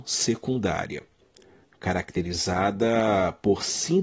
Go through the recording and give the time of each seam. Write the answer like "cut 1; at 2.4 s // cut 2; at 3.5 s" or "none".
none

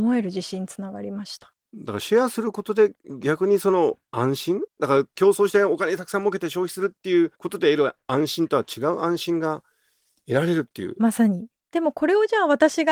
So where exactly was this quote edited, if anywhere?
cut 1; at 7.4 s

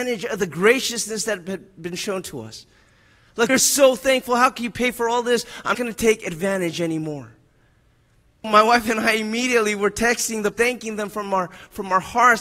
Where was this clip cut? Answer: cut 1; at 3.5 s // cut 2; at 5.7 s // cut 3; at 8.4 s // cut 4; at 10.5 s

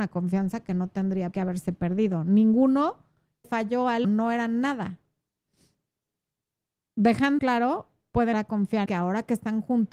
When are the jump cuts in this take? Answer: cut 1; at 1.3 s // cut 2; at 3.4 s // cut 3; at 4.0 s // cut 4; at 7.4 s // cut 5; at 8.3 s // cut 6; at 8.9 s

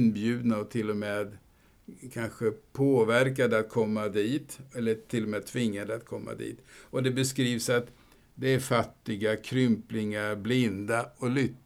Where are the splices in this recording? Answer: none

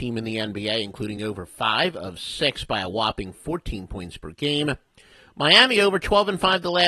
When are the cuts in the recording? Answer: none

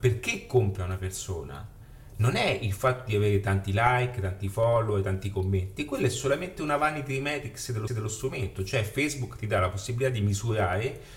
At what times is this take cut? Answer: cut 1; at 7.9 s

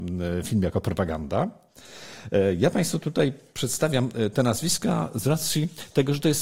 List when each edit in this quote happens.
none

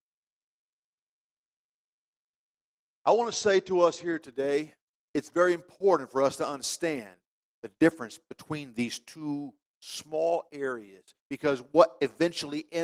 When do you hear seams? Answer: cut 1; at 11.2 s

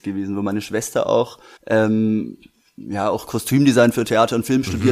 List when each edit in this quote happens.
cut 1; at 1.6 s

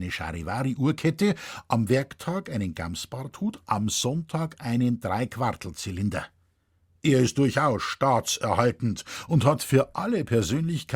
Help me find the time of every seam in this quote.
none

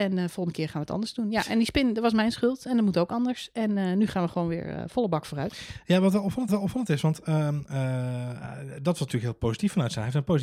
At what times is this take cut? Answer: cut 1; at 6.5 s

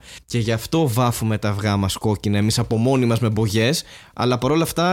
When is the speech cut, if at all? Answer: none

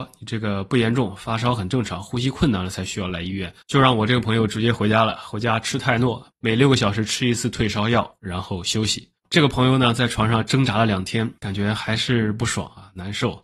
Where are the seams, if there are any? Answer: cut 1; at 3.6 s // cut 2; at 9.2 s // cut 3; at 11.4 s

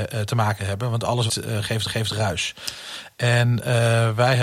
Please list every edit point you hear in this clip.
cut 1; at 1.3 s // cut 2; at 1.9 s

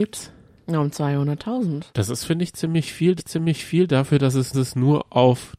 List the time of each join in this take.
cut 1; at 1.9 s // cut 2; at 3.2 s // cut 3; at 4.5 s

